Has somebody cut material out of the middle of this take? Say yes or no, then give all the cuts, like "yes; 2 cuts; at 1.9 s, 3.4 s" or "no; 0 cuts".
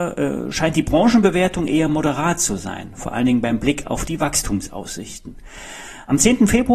no; 0 cuts